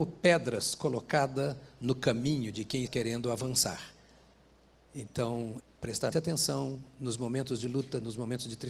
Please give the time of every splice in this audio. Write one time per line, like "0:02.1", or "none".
0:02.9
0:05.6
0:06.1